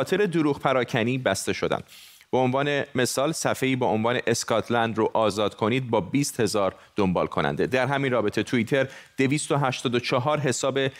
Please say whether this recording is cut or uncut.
uncut